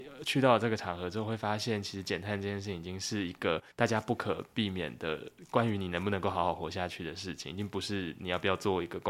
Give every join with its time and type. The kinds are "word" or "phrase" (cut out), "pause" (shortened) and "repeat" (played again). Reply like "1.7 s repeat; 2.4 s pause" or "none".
3.7 s pause